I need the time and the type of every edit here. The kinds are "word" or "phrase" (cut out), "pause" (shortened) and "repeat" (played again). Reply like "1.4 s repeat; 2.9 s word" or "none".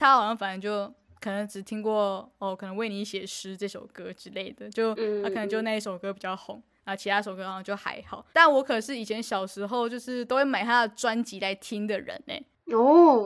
1.1 s pause; 8.3 s pause